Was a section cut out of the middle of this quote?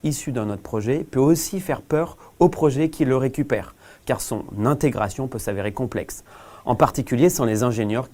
no; 0 cuts

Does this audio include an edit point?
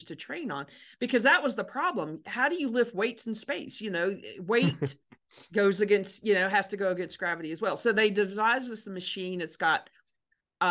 no; 0 cuts

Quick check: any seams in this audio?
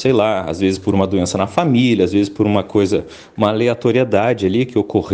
no; 0 cuts

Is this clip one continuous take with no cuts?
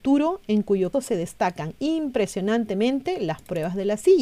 no; 1 cut; at 0.9 s

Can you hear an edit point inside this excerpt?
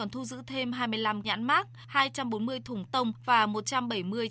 yes; 2 cuts; at 1.2 s, 2.9 s

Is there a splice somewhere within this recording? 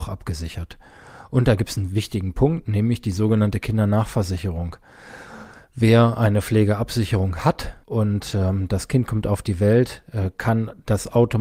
yes; 1 cut; at 7.8 s

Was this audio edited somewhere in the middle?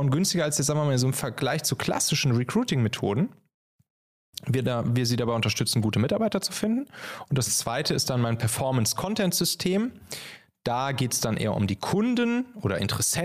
no; 0 cuts

